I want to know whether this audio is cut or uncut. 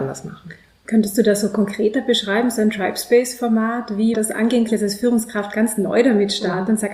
cut